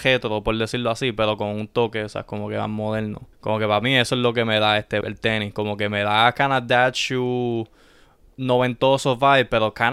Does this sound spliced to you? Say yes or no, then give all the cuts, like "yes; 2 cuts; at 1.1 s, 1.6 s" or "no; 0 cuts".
yes; 2 cuts; at 3.3 s, 5.0 s